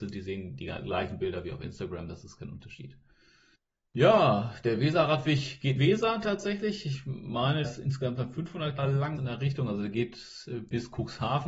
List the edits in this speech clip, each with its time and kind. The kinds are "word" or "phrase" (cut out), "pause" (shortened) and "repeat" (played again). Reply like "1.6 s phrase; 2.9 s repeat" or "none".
3.6 s pause; 5.8 s phrase; 7.6 s word; 8.8 s word; 9.2 s phrase